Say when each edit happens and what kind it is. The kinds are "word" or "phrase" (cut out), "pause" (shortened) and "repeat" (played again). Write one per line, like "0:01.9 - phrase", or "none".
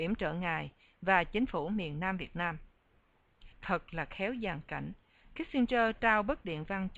0:03.5 - pause